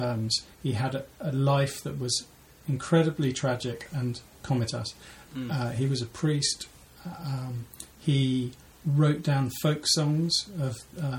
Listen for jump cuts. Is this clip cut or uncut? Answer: cut